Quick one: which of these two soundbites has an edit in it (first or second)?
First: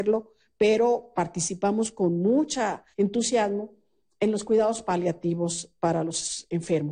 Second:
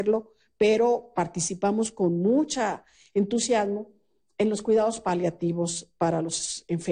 first